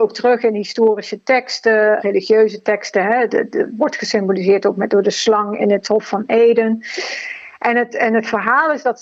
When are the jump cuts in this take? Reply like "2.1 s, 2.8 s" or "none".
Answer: 2.0 s, 3.3 s, 5.6 s